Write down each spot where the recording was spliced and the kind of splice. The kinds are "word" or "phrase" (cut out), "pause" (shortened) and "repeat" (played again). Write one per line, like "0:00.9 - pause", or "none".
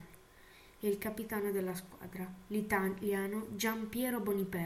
none